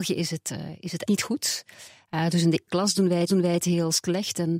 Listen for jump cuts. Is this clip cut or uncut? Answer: cut